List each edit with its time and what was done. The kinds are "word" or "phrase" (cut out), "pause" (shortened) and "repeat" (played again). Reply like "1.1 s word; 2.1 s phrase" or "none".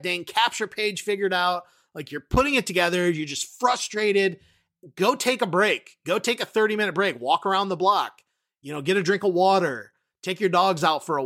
none